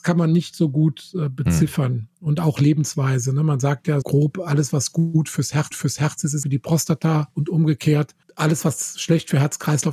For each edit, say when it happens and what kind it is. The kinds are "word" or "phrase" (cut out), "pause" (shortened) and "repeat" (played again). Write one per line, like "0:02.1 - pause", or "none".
0:04.0 - word
0:05.7 - repeat
0:06.4 - phrase
0:08.2 - pause